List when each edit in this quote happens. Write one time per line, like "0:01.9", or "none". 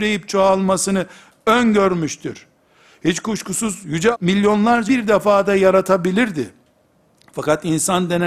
0:04.1
0:04.9